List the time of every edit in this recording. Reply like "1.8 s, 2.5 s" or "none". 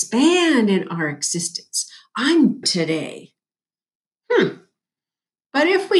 2.6 s